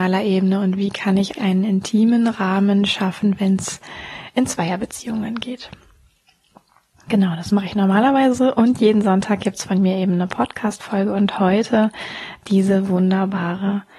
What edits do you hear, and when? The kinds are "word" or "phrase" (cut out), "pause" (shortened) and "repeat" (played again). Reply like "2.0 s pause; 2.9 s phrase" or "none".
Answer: 1.4 s word